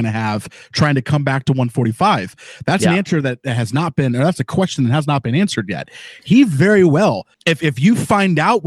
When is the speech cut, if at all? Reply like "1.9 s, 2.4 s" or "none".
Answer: 7.3 s